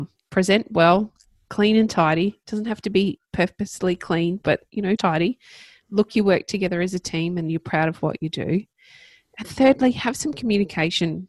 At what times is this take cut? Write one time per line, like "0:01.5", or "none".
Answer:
0:05.0
0:06.1
0:09.4